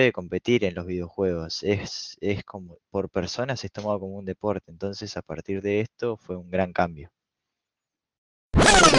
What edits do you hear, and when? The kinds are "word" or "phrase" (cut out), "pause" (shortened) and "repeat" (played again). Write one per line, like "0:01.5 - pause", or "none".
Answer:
none

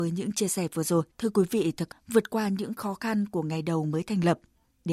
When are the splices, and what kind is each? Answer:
0:01.1 - pause
0:01.9 - word

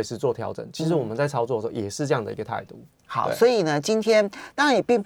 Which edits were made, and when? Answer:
none

